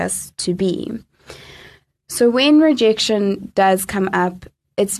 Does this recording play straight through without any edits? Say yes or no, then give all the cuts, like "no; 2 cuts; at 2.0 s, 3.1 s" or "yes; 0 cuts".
yes; 0 cuts